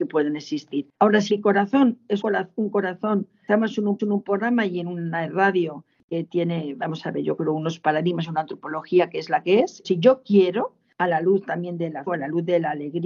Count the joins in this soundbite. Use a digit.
6